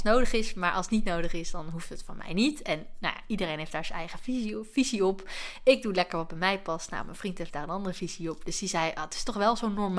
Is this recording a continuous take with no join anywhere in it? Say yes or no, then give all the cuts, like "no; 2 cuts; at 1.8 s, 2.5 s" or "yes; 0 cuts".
yes; 0 cuts